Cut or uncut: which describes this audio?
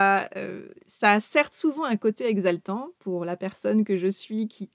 uncut